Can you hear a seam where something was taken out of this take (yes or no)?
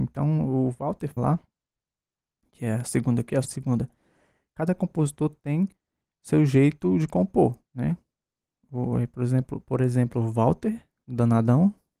yes